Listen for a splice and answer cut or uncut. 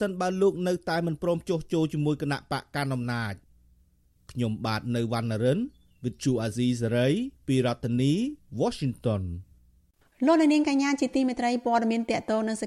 uncut